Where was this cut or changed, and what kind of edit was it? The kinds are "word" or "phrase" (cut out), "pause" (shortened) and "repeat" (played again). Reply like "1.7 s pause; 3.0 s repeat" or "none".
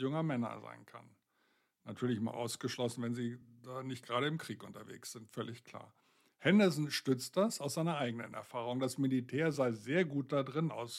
none

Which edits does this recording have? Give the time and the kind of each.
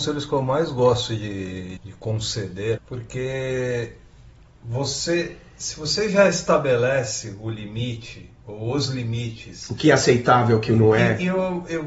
1.8 s word; 2.8 s phrase

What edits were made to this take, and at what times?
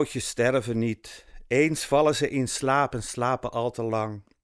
none

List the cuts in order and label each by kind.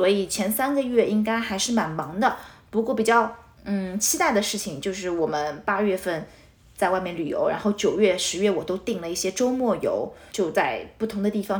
10.3 s word

